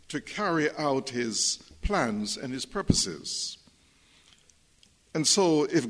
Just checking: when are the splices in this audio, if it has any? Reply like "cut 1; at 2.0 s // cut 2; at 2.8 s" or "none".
none